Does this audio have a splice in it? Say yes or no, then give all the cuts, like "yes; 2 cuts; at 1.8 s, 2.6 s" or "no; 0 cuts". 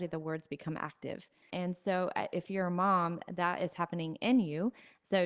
yes; 1 cut; at 1.5 s